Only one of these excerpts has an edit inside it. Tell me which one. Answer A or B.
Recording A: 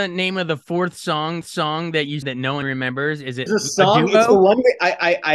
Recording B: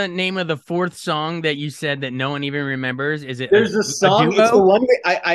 A